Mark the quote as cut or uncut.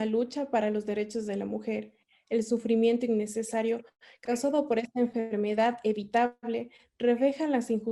uncut